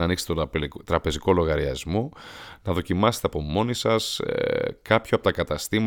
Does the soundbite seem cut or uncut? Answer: uncut